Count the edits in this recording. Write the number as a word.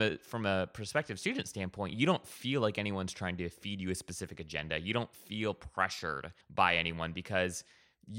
one